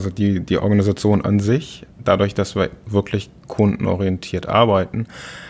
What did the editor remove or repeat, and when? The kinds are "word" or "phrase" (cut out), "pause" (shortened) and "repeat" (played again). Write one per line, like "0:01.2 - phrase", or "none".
0:01.9 - pause